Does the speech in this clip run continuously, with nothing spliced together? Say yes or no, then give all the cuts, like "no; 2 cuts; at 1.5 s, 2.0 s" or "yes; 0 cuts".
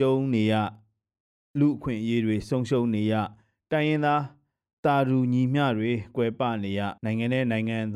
no; 1 cut; at 7.0 s